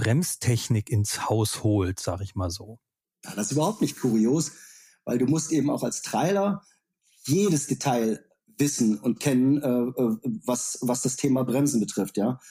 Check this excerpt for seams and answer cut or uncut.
cut